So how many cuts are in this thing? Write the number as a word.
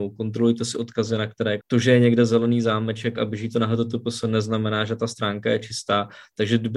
one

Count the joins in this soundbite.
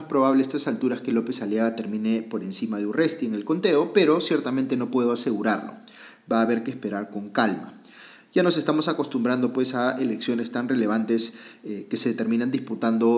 zero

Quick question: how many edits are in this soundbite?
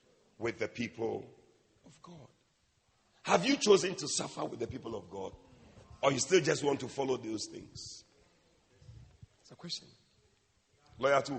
zero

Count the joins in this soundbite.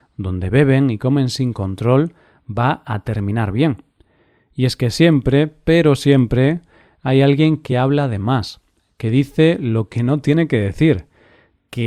zero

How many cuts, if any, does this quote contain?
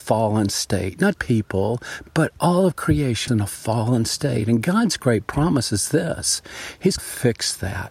three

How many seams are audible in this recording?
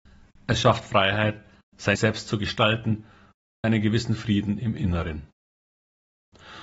two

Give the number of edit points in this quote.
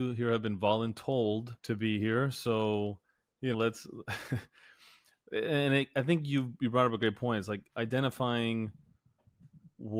two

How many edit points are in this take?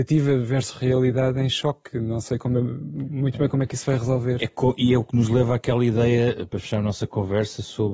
one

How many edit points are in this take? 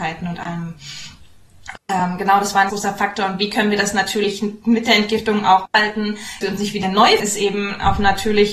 four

